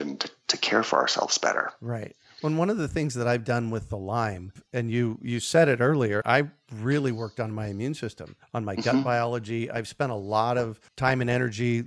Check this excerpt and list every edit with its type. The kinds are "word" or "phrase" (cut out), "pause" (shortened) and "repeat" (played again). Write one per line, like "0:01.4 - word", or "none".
none